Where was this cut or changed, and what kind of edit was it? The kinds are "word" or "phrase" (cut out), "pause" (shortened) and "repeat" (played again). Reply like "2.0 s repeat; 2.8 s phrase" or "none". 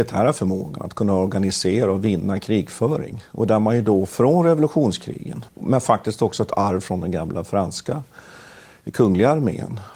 5.5 s pause

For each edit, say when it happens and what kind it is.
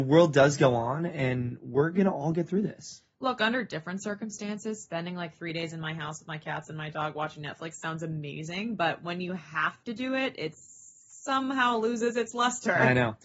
none

